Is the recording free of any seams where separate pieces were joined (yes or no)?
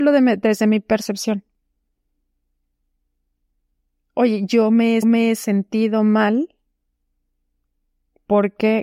no